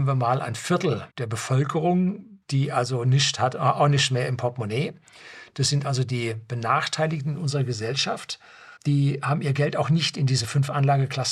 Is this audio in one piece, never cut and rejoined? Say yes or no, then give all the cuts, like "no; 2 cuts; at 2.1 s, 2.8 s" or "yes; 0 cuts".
no; 3 cuts; at 1.1 s, 2.4 s, 8.8 s